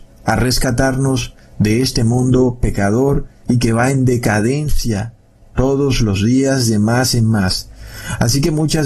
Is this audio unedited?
yes; 0 cuts

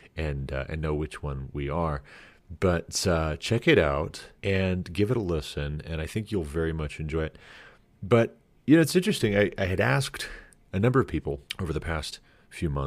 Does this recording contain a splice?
no; 0 cuts

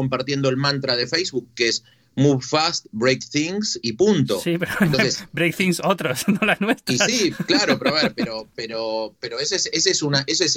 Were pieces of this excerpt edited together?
no; 0 cuts

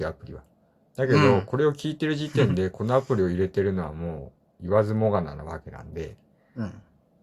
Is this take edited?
no; 0 cuts

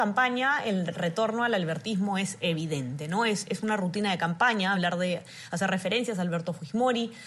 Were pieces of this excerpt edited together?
no; 0 cuts

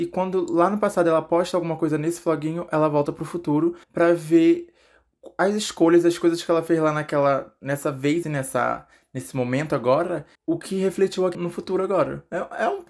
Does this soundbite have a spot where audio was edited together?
yes; 4 cuts; at 3.8 s, 8.2 s, 10.3 s, 11.3 s

